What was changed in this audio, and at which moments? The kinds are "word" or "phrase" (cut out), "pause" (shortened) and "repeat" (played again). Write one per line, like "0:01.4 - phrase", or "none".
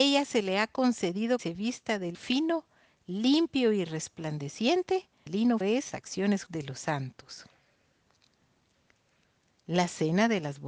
0:01.4 - word
0:02.1 - word
0:05.3 - word
0:05.6 - word
0:05.9 - word
0:06.5 - word